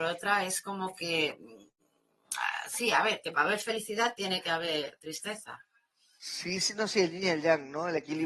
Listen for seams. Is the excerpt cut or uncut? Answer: uncut